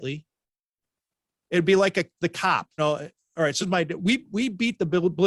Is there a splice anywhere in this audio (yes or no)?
yes